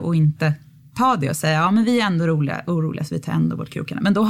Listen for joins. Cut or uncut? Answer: uncut